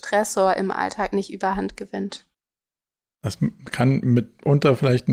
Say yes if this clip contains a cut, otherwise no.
no